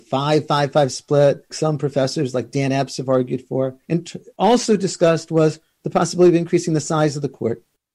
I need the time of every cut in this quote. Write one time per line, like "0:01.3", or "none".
0:01.5
0:03.8